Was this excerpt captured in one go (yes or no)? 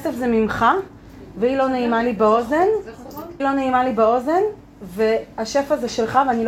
no